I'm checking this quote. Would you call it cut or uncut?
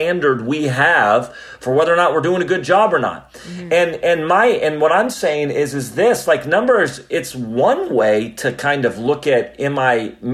uncut